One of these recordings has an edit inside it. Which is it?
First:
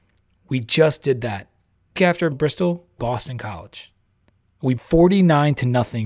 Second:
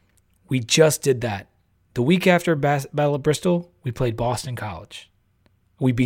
first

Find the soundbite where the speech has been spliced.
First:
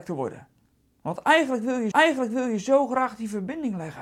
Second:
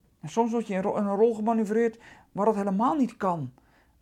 first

